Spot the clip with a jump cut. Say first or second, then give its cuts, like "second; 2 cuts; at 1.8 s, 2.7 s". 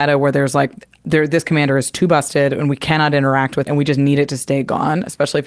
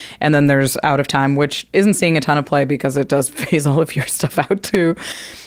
first; 1 cut; at 3.6 s